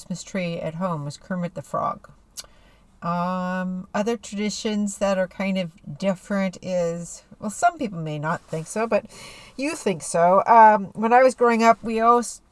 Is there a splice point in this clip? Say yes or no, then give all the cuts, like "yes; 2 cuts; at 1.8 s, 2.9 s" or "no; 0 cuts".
no; 0 cuts